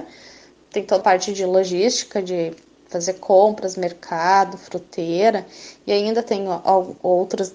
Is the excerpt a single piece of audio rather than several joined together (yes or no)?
no